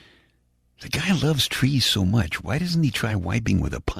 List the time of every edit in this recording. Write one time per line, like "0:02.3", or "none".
none